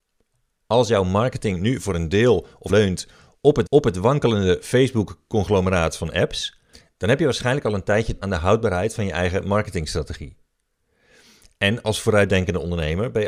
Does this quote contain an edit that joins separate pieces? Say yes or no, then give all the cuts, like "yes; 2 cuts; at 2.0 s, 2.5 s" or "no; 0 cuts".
yes; 4 cuts; at 2.7 s, 3.7 s, 6.7 s, 8.2 s